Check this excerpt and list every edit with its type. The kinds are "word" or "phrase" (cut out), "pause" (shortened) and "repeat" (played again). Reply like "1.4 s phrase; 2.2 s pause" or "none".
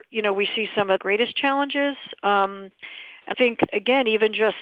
1.0 s word; 3.3 s word; 3.7 s word